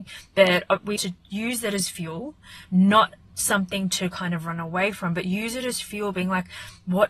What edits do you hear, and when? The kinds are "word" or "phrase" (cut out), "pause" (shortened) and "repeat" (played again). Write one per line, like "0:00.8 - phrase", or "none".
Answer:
0:01.0 - word